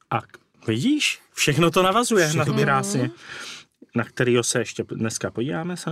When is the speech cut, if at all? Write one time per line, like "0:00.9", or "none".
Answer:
0:02.5